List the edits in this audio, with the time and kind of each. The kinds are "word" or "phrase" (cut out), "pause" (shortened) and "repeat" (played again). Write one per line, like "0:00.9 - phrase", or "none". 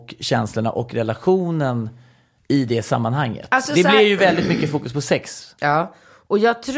none